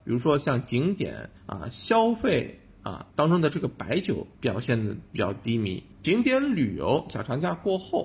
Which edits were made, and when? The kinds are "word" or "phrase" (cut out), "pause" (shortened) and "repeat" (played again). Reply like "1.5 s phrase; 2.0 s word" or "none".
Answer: 1.4 s pause; 3.1 s pause; 4.3 s pause; 5.9 s pause